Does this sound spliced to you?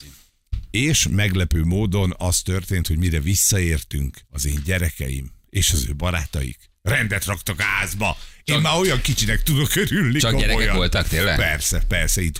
yes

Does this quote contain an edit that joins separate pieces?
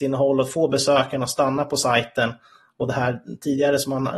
no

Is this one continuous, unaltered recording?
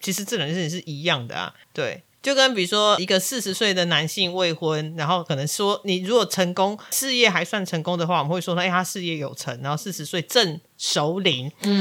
no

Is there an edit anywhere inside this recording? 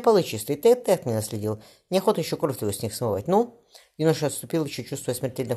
no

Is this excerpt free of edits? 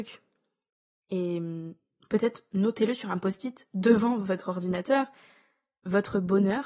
yes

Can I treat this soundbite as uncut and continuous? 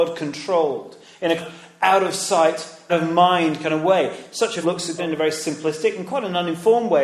no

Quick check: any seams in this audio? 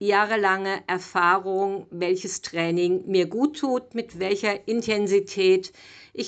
no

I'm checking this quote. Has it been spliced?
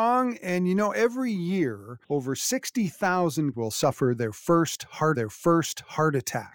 yes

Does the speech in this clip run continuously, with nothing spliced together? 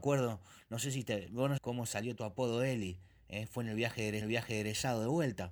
no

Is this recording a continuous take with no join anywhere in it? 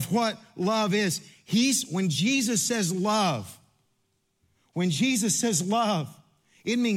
yes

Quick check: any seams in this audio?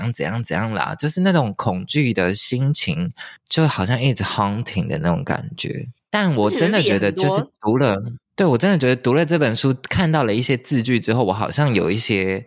no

